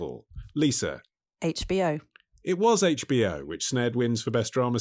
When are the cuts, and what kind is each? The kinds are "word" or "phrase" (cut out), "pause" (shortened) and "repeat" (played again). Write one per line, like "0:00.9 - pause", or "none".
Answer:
none